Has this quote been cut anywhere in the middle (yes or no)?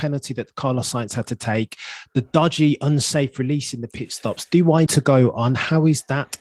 yes